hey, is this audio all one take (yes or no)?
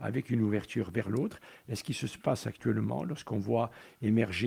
yes